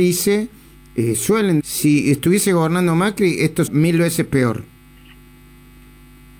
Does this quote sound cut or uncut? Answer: cut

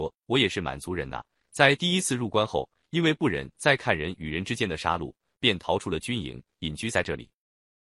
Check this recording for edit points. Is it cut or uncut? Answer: uncut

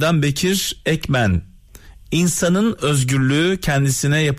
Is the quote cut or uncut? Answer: uncut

